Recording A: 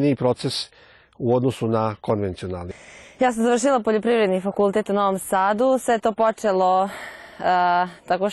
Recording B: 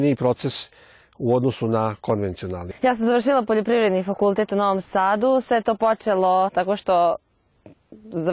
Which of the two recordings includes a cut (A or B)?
B